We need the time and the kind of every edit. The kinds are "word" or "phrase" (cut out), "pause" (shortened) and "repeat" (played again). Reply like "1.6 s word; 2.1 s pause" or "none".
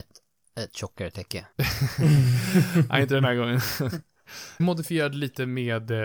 1.5 s pause; 4.6 s word